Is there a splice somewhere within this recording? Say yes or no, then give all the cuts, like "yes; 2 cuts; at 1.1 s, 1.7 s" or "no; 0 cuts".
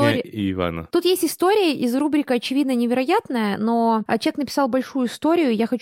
no; 0 cuts